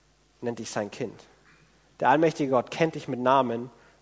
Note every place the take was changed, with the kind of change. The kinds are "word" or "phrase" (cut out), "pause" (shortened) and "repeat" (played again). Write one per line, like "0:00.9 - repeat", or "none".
none